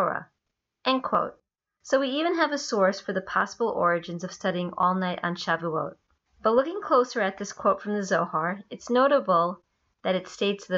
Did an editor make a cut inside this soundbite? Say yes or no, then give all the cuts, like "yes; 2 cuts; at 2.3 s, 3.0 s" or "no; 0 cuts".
no; 0 cuts